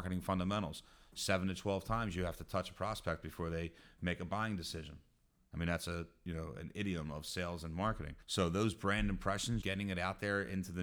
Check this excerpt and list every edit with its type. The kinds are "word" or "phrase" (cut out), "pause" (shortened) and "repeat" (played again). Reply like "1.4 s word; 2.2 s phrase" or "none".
8.2 s pause; 9.6 s word